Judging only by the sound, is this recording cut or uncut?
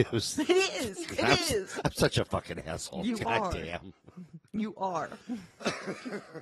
cut